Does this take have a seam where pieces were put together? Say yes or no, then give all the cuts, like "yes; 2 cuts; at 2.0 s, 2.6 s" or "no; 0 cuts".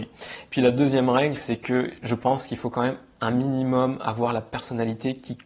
no; 0 cuts